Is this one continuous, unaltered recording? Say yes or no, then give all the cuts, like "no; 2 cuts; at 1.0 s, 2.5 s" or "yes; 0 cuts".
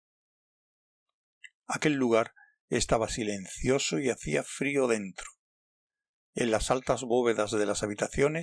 yes; 0 cuts